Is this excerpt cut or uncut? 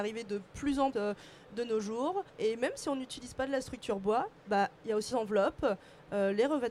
cut